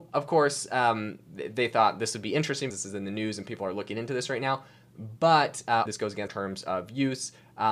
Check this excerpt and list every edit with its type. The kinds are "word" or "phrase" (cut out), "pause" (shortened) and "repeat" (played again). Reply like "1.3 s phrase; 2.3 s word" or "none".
2.7 s word; 5.9 s phrase; 6.3 s word

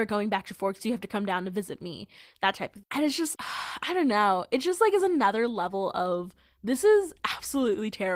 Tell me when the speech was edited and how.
3.3 s word

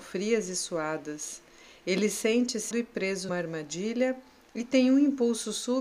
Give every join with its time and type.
2.7 s word; 3.3 s word

